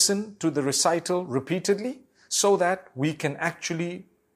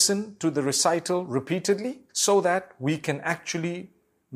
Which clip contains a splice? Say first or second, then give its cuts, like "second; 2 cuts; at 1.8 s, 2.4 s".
second; 1 cut; at 2.1 s